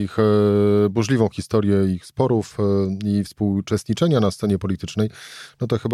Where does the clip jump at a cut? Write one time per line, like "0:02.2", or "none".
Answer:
none